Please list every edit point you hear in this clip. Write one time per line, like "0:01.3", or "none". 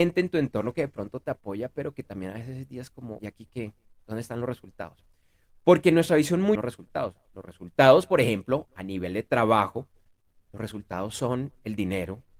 0:03.2
0:06.5